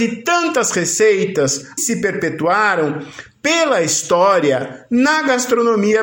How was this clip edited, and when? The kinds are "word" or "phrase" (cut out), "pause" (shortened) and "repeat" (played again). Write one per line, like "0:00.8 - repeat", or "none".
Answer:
0:01.8 - word